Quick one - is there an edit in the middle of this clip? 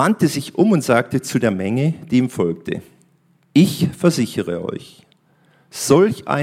no; 0 cuts

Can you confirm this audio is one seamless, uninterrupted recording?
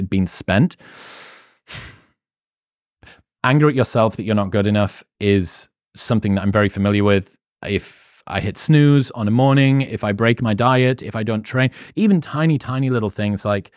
yes; 0 cuts

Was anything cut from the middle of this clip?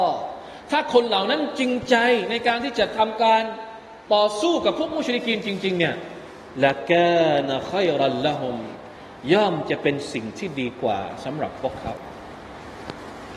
yes; 1 cut; at 4.0 s

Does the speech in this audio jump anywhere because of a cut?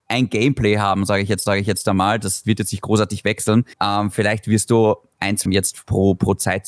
yes; 4 cuts; at 1.5 s, 2.4 s, 3.7 s, 5.5 s

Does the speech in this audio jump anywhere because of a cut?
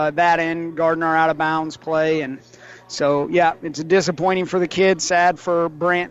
no; 0 cuts

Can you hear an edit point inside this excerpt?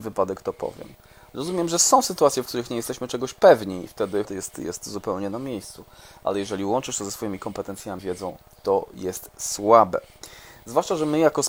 yes; 3 cuts; at 3.9 s, 4.2 s, 8.0 s

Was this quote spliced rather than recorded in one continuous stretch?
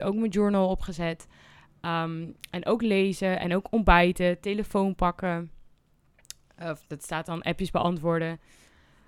no; 0 cuts

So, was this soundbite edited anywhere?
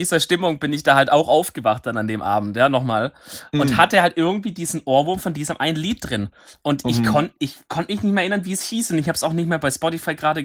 no; 0 cuts

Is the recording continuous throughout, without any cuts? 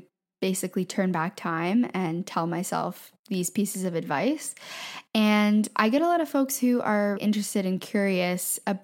no; 2 cuts; at 3.2 s, 7.2 s

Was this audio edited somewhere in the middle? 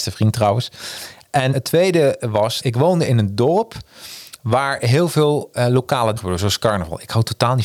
yes; 3 cuts; at 1.5 s, 2.6 s, 6.2 s

